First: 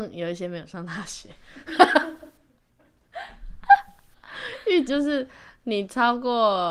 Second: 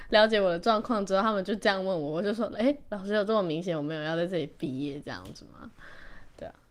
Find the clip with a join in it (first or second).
first